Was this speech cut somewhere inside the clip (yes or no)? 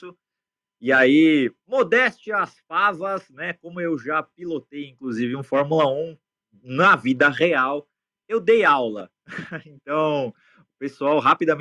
no